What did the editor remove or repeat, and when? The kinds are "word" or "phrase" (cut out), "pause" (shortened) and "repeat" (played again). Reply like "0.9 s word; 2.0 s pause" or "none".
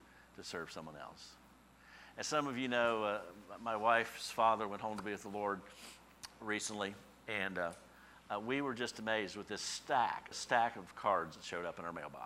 10.3 s word